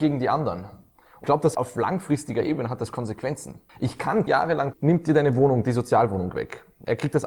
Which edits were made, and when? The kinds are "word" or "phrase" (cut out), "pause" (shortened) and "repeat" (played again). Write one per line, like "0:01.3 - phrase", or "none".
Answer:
0:01.2 - word
0:01.5 - word
0:03.7 - pause
0:04.3 - word
0:04.7 - phrase